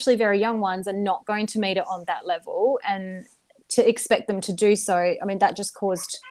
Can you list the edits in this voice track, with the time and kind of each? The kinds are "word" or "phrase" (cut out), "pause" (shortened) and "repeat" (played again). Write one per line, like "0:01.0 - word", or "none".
none